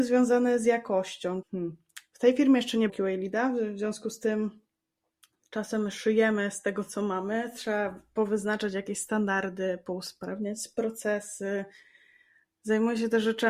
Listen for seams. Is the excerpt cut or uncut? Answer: cut